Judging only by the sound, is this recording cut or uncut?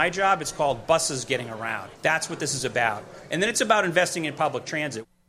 cut